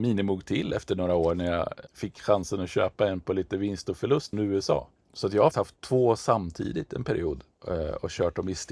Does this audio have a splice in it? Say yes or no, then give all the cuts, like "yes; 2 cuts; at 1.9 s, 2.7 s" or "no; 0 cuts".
yes; 4 cuts; at 1.9 s, 4.3 s, 5.0 s, 5.5 s